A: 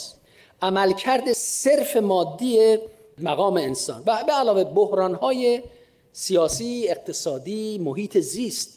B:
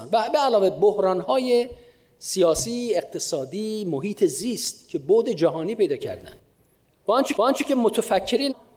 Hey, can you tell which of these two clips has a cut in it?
B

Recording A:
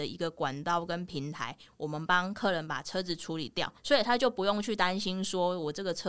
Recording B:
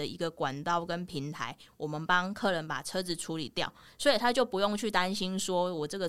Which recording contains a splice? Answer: A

